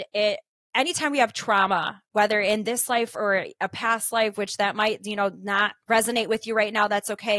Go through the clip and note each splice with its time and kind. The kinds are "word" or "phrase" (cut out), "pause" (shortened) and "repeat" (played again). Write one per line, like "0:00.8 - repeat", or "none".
0:05.8 - pause